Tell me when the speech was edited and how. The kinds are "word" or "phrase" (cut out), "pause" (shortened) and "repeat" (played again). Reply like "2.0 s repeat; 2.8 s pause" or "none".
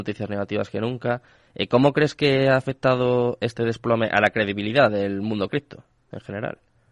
none